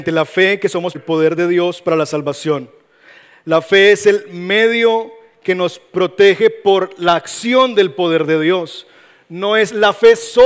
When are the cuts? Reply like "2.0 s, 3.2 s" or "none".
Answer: 0.9 s